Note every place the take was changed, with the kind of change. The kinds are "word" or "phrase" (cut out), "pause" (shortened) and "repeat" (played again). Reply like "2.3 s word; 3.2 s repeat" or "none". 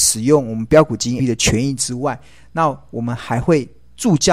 1.2 s phrase

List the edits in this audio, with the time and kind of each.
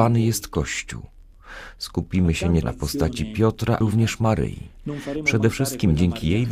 2.6 s word; 3.8 s word

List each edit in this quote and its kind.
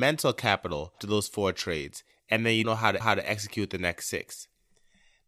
1.0 s word; 2.6 s word; 3.0 s repeat

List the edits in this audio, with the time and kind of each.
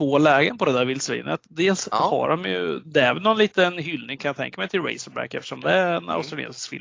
none

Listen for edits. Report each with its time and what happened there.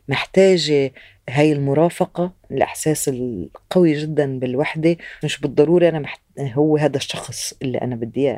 2.5 s word; 5.2 s word

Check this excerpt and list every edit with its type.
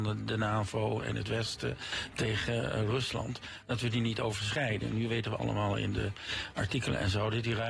5.4 s phrase

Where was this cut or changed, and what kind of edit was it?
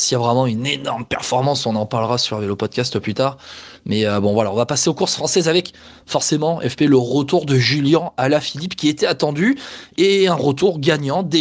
none

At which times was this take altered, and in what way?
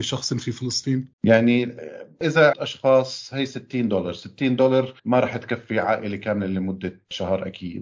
1.1 s pause; 2.5 s phrase; 5.0 s pause

